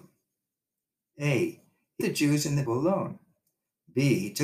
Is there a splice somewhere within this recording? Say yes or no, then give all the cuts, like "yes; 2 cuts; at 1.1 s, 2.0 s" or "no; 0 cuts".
yes; 2 cuts; at 2.0 s, 2.6 s